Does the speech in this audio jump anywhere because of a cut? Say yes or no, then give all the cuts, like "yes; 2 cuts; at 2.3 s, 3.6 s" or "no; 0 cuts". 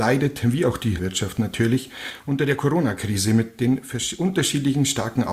yes; 1 cut; at 1.0 s